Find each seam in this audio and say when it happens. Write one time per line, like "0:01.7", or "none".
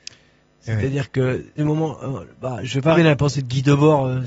0:01.6
0:02.9